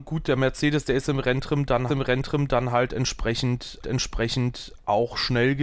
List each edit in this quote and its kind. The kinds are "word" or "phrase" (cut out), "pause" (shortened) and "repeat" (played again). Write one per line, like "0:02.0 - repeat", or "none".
0:01.9 - repeat
0:03.8 - repeat

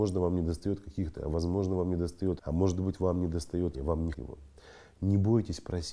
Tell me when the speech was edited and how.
0:01.1 - word
0:02.4 - word
0:03.7 - word
0:04.1 - word

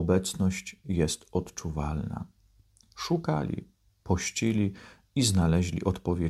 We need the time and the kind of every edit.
none

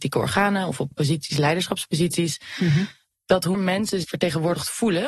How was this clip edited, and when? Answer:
0:00.9 - word
0:03.5 - word
0:04.0 - word

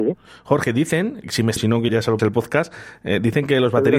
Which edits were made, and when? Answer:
0:01.2 - word
0:01.6 - word
0:01.9 - word
0:02.2 - word

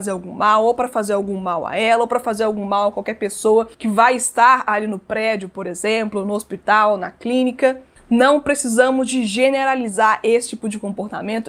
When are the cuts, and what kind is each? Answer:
0:03.7 - pause

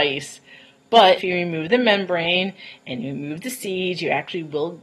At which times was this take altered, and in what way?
0:01.2 - word

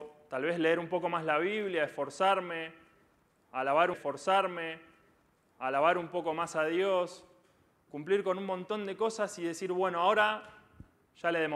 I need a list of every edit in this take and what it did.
0:03.9 - repeat

